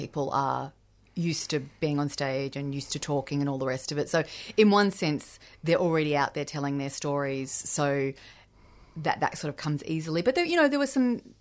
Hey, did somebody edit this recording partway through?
no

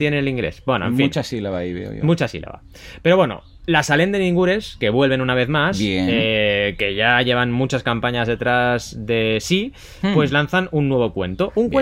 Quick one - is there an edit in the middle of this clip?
no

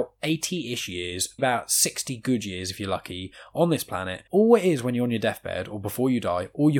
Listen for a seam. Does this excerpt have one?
yes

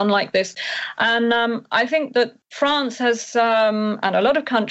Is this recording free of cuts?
yes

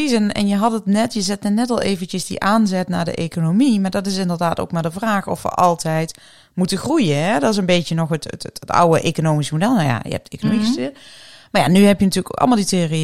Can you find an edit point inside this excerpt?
no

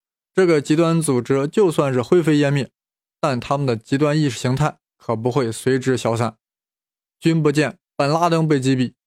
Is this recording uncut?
no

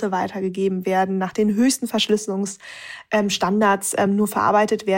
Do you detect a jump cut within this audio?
no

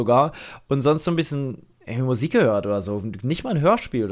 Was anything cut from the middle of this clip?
no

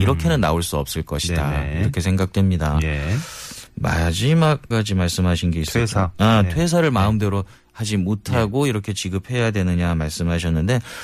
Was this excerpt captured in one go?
no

